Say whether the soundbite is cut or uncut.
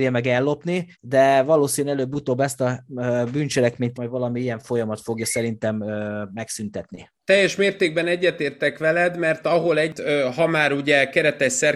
cut